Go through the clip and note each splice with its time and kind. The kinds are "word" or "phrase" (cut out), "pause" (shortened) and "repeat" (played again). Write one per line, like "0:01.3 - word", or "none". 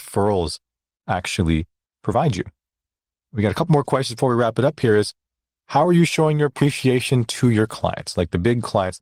none